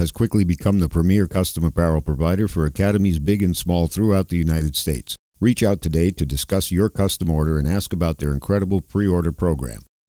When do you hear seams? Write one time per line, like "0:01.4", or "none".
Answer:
none